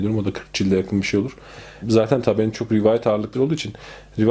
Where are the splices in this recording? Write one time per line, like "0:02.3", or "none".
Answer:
0:01.8
0:02.5
0:03.3